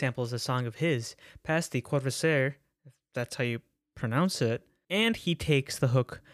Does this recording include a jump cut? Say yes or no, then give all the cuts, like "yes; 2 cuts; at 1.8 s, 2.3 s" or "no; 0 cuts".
no; 0 cuts